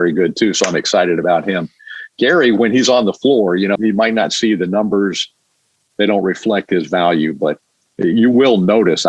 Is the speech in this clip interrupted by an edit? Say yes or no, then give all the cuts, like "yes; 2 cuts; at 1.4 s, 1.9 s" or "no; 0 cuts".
yes; 1 cut; at 3.8 s